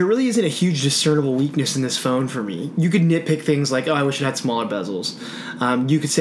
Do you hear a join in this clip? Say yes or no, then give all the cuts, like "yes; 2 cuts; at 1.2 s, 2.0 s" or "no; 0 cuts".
no; 0 cuts